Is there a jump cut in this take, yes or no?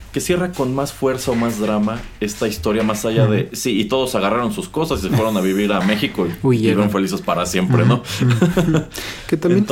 no